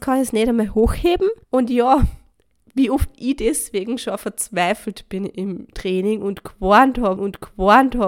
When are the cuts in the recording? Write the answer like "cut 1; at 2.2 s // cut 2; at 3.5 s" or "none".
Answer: cut 1; at 1.4 s // cut 2; at 2.3 s // cut 3; at 7.2 s